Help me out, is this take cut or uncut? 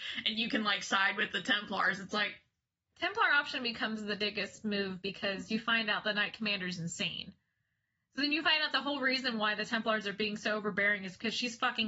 uncut